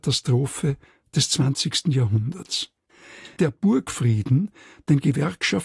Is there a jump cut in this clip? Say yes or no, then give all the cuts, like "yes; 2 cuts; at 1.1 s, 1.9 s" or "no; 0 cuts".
no; 0 cuts